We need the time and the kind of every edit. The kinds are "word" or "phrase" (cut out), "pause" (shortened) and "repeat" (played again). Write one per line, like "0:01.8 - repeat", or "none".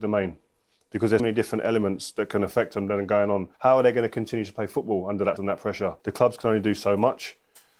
0:01.2 - word
0:03.5 - pause
0:05.4 - word
0:06.0 - pause